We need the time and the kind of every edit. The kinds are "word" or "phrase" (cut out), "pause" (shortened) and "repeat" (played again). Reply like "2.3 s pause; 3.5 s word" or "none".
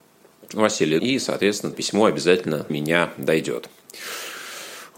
1.0 s word; 1.7 s phrase; 2.7 s word